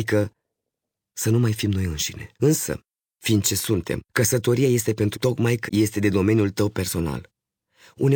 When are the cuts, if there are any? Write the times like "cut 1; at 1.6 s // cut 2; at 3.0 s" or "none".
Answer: cut 1; at 2.4 s // cut 2; at 3.4 s // cut 3; at 4.1 s // cut 4; at 5.1 s // cut 5; at 5.7 s